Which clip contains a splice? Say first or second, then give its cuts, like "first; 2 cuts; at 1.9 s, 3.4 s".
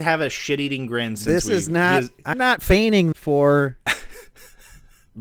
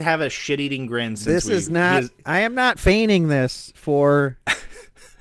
first; 2 cuts; at 2.3 s, 3.1 s